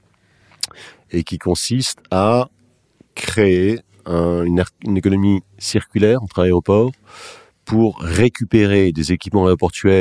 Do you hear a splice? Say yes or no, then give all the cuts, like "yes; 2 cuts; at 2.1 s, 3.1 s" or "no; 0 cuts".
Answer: no; 0 cuts